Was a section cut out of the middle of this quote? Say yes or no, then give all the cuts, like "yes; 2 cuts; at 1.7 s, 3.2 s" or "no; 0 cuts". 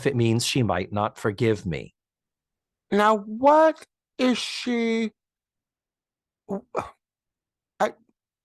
no; 0 cuts